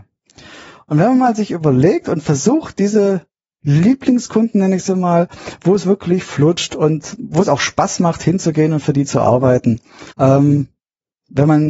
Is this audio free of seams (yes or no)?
no